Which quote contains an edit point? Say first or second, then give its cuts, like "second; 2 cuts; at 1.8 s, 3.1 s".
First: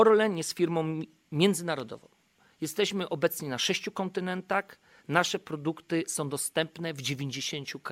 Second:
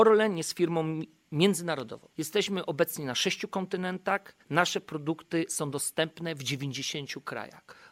second; 2 cuts; at 2.1 s, 4.4 s